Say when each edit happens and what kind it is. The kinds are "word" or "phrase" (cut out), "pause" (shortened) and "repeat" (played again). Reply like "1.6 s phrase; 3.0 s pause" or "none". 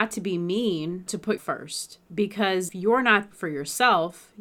1.1 s word; 1.4 s word; 2.7 s word; 3.3 s word

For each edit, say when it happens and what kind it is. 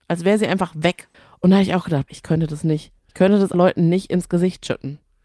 1.1 s pause; 2.1 s word; 3.0 s pause; 3.5 s word

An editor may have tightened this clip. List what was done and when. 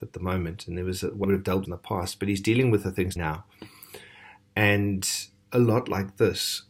1.2 s word; 1.6 s phrase; 3.2 s word

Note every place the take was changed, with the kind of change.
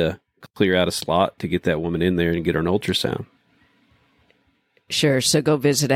none

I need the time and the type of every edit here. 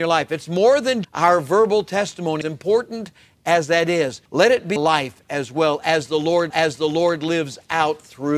1.0 s word; 2.4 s word; 4.3 s pause; 4.8 s word; 6.5 s repeat

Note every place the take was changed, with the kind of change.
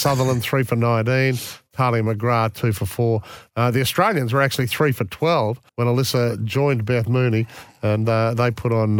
5.7 s pause

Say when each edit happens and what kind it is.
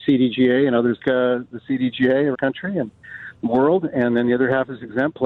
1.0 s word; 2.3 s word

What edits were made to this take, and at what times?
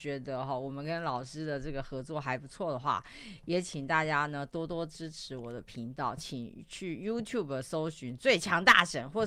none

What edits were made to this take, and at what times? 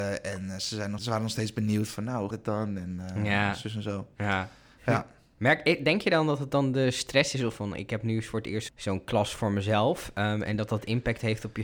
1.0 s word; 2.3 s word; 7.5 s word; 8.7 s word

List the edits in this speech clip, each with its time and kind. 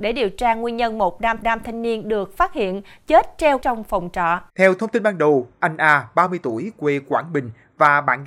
1.4 s repeat; 3.6 s word; 4.5 s pause

